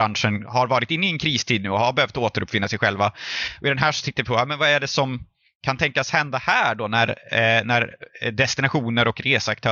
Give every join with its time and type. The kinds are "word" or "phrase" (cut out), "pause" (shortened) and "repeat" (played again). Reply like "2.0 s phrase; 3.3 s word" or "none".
none